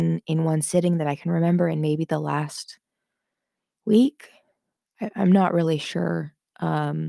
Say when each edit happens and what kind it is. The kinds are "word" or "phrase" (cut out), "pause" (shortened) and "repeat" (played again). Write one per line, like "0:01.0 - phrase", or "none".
none